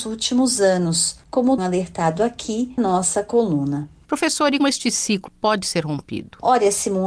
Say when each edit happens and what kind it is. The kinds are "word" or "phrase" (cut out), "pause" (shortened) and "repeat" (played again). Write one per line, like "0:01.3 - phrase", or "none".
0:01.6 - word
0:02.8 - word
0:04.6 - word
0:05.3 - word

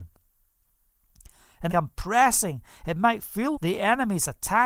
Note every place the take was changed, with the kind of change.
0:01.7 - phrase
0:03.5 - word

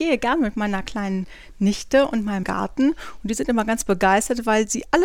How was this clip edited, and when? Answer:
0:02.4 - phrase

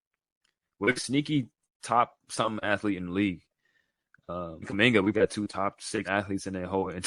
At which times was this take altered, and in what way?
0:01.0 - word
0:04.6 - word
0:05.1 - word
0:06.0 - word

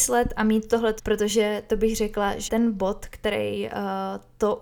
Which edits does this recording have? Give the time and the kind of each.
0:01.0 - word
0:02.5 - word

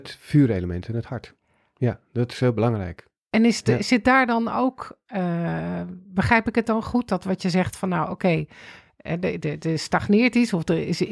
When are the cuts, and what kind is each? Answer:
none

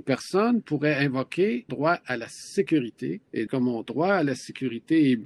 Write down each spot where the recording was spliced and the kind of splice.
0:01.7 - word
0:03.5 - word

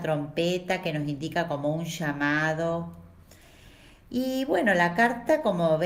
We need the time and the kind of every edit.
none

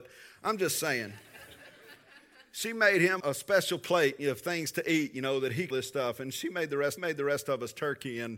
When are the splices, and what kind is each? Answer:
0:03.2 - word
0:05.7 - phrase
0:07.0 - repeat

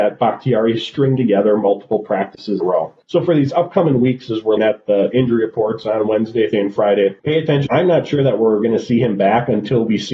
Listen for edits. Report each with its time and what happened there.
0:02.6 - phrase
0:03.0 - pause
0:04.6 - word
0:06.5 - word
0:07.2 - pause
0:07.7 - phrase

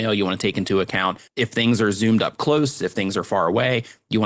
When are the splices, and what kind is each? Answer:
0:01.3 - pause

